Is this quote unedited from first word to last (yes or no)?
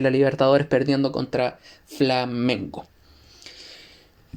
yes